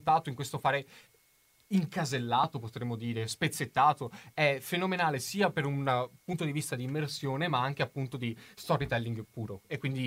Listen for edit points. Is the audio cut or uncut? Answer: uncut